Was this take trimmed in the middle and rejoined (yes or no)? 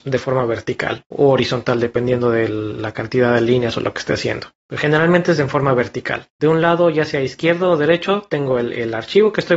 yes